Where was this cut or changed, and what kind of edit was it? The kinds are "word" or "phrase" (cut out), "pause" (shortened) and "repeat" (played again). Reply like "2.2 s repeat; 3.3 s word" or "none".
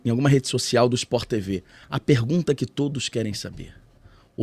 none